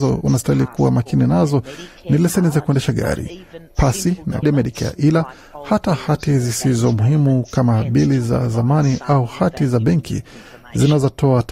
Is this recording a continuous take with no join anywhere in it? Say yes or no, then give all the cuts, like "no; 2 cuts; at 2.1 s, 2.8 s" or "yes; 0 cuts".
no; 1 cut; at 4.4 s